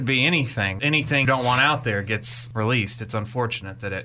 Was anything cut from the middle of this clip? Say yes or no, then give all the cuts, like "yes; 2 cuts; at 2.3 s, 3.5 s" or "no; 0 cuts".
yes; 1 cut; at 1.2 s